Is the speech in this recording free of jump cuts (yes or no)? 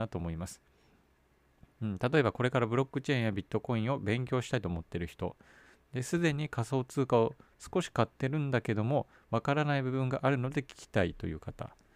yes